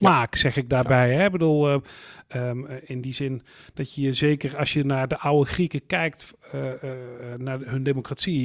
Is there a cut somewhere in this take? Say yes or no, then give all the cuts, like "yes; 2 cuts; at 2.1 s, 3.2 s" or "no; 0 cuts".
no; 0 cuts